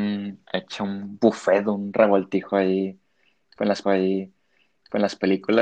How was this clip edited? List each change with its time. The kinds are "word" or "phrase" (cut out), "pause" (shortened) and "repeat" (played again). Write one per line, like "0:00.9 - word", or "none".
0:03.8 - repeat